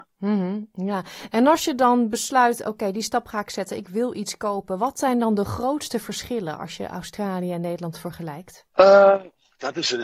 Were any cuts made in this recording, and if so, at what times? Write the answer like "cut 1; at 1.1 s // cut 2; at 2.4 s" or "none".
cut 1; at 8.7 s